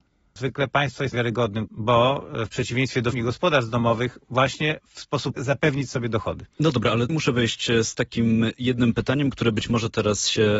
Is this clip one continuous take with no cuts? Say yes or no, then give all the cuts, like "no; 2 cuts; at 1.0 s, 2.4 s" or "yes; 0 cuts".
no; 6 cuts; at 1.1 s, 1.7 s, 3.1 s, 4.8 s, 5.4 s, 7.1 s